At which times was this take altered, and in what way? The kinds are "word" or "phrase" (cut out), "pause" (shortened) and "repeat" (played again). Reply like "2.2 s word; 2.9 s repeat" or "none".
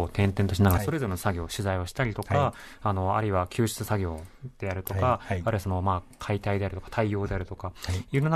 none